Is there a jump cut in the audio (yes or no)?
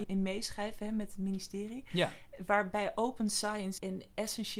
no